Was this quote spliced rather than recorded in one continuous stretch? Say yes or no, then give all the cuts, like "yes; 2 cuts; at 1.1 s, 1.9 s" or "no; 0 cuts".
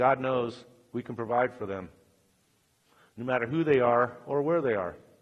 no; 0 cuts